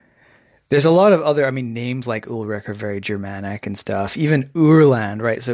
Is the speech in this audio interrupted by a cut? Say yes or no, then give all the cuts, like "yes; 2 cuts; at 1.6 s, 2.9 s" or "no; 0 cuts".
no; 0 cuts